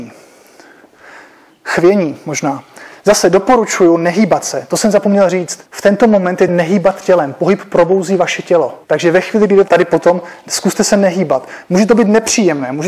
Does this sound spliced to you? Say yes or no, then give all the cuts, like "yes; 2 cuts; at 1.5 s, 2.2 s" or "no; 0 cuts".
yes; 4 cuts; at 5.7 s, 6.5 s, 8.8 s, 9.7 s